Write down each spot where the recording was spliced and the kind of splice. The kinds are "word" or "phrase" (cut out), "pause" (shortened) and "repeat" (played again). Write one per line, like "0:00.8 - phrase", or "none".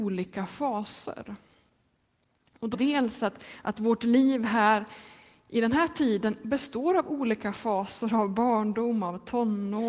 0:02.7 - phrase